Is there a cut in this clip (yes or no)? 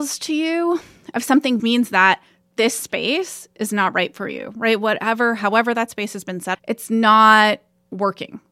yes